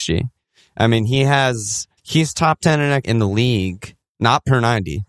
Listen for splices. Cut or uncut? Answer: cut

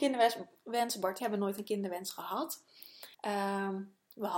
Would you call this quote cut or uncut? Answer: cut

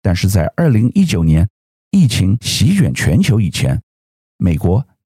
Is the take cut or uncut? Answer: uncut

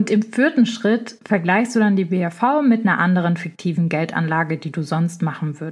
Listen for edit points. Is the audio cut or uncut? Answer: uncut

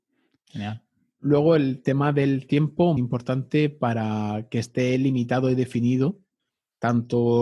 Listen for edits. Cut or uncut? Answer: cut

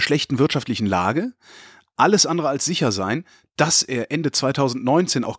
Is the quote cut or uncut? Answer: uncut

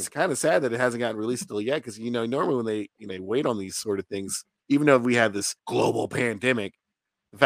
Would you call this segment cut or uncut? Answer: cut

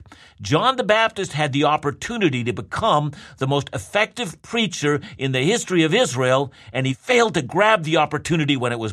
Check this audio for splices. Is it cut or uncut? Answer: uncut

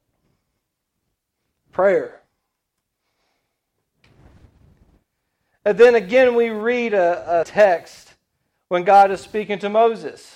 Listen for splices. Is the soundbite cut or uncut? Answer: cut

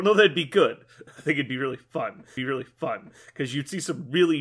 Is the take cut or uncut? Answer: cut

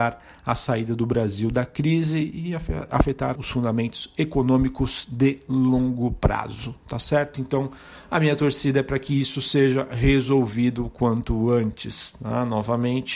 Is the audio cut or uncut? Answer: cut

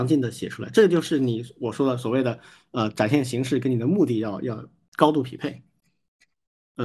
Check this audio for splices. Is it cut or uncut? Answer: uncut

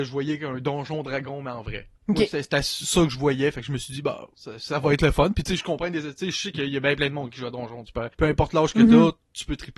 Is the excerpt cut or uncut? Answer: cut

